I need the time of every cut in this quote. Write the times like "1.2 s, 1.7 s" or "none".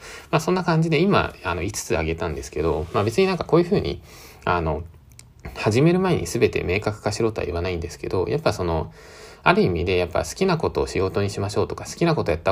none